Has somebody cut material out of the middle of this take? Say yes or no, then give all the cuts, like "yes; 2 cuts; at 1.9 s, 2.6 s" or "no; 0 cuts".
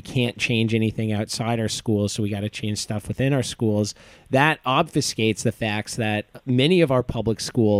no; 0 cuts